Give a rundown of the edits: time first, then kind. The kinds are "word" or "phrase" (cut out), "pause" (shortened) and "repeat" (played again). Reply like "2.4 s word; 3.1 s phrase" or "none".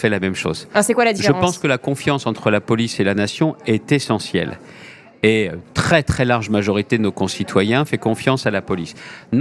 none